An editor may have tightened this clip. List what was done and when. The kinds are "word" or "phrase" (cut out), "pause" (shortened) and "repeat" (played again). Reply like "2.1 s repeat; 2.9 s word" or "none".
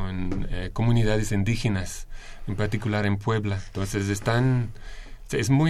none

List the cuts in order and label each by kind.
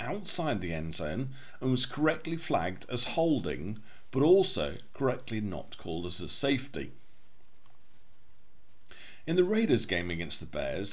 none

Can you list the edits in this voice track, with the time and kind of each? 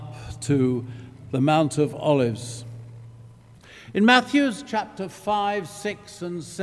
none

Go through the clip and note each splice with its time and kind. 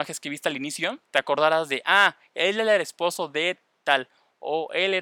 1.0 s pause

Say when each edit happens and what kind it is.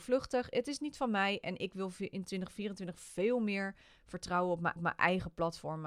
4.8 s repeat

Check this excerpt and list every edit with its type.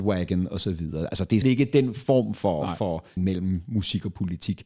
1.4 s word; 3.2 s word

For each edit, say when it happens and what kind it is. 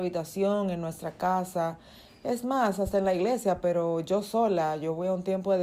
none

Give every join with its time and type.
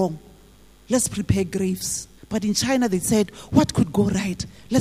2.2 s pause

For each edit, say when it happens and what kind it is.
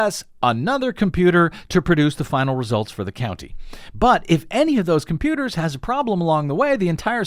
none

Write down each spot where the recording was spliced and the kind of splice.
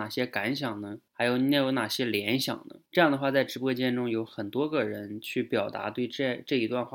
1.1 s pause; 2.9 s pause

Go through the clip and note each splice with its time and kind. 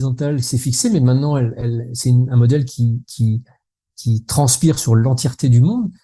none

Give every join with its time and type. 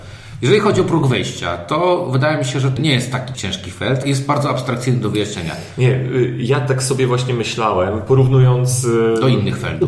2.8 s word; 3.3 s word; 4.0 s word

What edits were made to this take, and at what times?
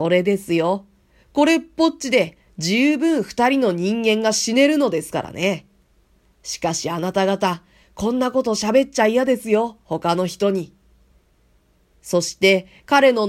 none

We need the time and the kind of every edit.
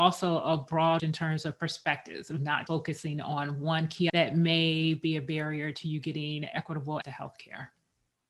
1.0 s word; 2.7 s word; 4.1 s word; 7.0 s word

